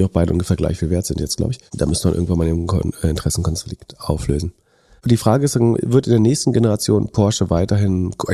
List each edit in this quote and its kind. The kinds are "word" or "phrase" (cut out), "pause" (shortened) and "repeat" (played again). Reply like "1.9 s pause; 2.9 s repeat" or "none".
none

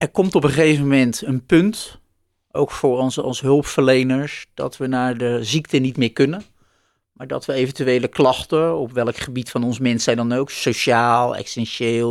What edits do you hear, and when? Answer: 5.9 s word

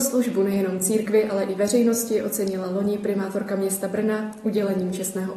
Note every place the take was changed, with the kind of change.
none

